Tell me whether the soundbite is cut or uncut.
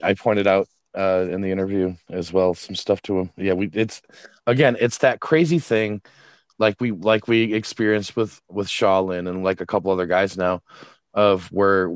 uncut